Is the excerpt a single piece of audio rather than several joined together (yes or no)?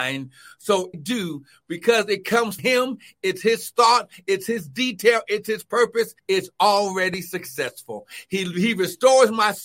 no